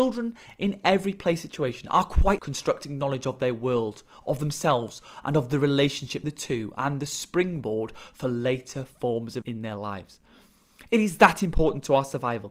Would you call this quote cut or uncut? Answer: cut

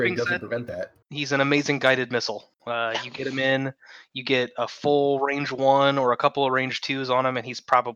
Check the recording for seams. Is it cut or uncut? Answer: cut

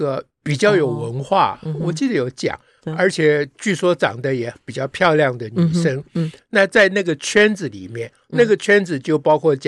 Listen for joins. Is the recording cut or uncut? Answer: uncut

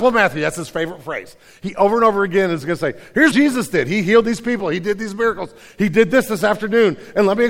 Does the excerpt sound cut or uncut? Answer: cut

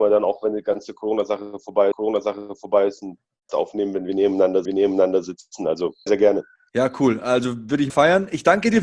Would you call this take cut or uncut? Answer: cut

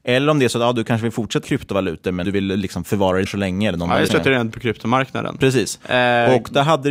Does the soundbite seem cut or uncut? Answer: cut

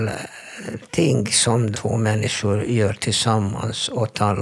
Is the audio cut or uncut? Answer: cut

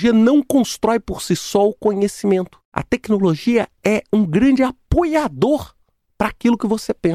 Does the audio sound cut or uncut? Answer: cut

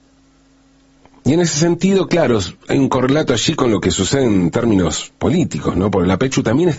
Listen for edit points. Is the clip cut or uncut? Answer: uncut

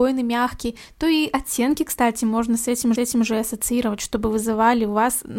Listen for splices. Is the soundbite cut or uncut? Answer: cut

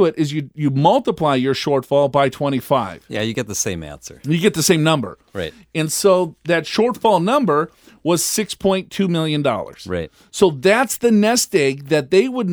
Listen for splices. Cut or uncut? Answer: uncut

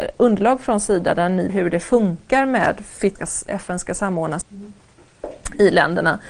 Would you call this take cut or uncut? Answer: cut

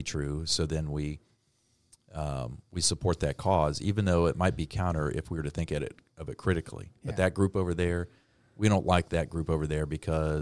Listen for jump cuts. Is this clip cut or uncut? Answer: uncut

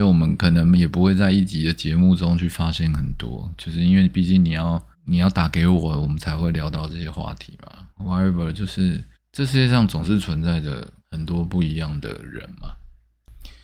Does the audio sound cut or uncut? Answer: cut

